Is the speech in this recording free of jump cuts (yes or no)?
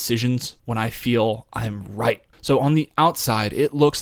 yes